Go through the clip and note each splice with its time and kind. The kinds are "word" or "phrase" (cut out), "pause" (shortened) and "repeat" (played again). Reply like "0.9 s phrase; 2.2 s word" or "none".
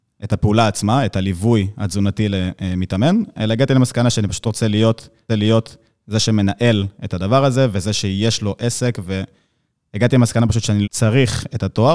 5.3 s repeat; 10.8 s phrase

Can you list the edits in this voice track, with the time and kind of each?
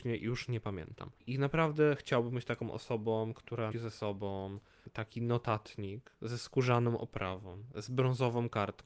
1.2 s pause; 3.7 s word

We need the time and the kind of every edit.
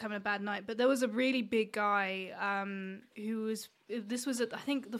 none

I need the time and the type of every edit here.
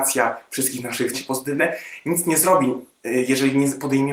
1.1 s phrase

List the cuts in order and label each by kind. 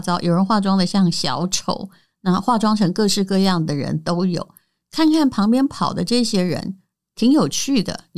none

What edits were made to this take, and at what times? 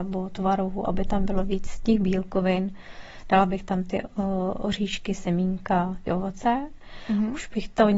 6.1 s word

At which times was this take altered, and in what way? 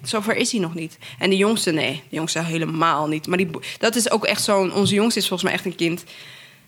none

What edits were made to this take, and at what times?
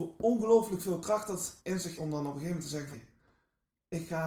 1.6 s pause; 2.0 s word; 2.9 s word

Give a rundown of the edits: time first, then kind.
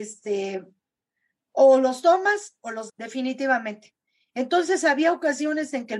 2.9 s word

